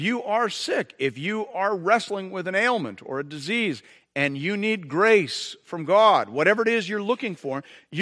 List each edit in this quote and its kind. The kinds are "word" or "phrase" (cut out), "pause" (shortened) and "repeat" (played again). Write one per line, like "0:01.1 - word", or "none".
none